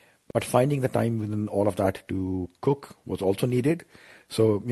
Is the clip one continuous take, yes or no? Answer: yes